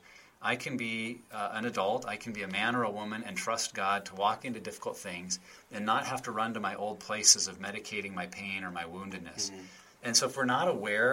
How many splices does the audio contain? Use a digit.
0